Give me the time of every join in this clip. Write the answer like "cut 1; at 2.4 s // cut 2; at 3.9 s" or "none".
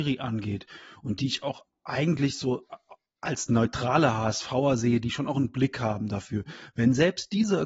none